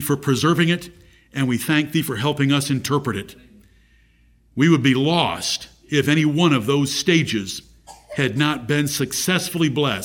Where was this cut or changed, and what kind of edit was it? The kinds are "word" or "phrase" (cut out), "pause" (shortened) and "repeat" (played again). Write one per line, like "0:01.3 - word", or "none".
none